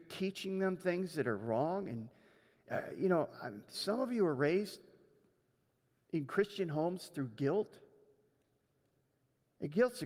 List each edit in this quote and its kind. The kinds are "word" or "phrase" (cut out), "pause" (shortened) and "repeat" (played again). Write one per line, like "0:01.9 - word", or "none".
none